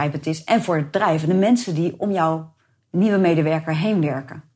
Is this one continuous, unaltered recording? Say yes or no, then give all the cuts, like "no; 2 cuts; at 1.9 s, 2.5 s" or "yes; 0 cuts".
yes; 0 cuts